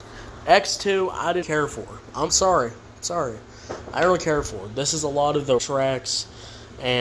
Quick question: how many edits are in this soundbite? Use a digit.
3